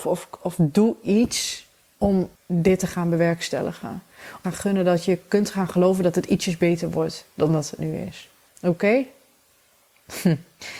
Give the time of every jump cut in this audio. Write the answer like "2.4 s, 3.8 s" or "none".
2.4 s, 4.4 s, 8.5 s

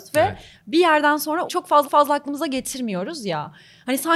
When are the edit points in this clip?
1.5 s, 1.8 s

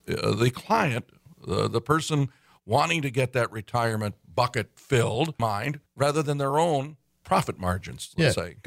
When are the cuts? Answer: 5.4 s

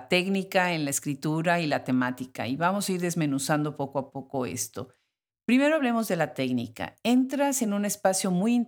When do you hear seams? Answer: none

